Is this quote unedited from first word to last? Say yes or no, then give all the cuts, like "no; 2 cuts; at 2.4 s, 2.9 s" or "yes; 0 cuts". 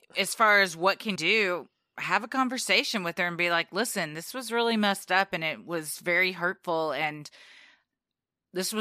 no; 1 cut; at 1.2 s